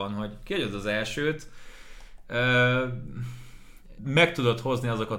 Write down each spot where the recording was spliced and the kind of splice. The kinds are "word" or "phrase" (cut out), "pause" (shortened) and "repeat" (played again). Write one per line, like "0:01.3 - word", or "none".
0:04.0 - word